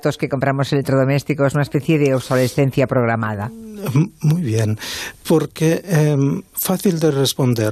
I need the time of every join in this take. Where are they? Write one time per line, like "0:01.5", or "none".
0:06.5